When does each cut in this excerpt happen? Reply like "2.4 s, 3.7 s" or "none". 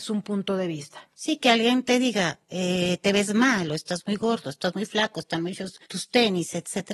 1.1 s, 5.8 s